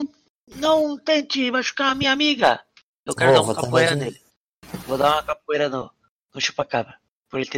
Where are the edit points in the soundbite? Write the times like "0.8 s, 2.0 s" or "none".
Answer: none